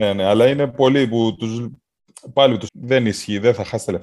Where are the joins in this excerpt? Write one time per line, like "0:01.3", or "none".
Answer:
0:02.7